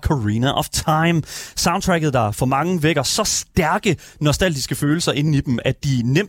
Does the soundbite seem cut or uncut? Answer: uncut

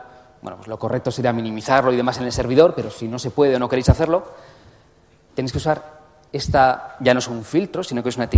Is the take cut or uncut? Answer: uncut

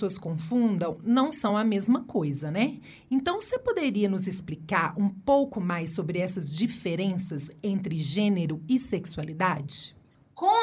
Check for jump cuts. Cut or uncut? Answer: uncut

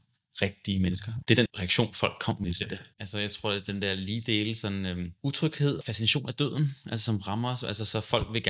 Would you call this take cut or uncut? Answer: cut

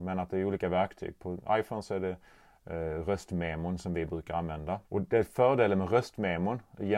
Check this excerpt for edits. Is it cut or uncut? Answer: cut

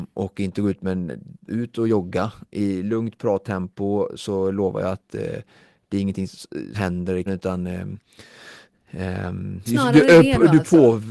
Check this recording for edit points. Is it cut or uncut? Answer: cut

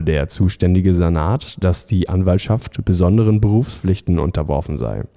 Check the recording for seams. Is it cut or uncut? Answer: uncut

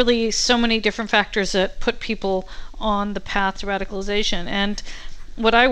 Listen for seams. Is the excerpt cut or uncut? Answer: uncut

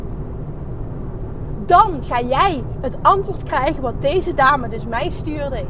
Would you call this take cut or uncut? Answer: uncut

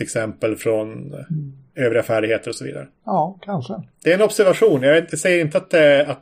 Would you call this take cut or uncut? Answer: cut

